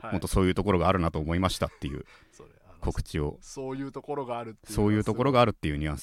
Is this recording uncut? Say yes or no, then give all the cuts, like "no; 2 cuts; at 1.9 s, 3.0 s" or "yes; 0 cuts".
yes; 0 cuts